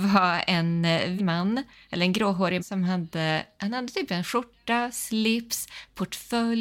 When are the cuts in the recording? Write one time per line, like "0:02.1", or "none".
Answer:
0:01.2
0:02.6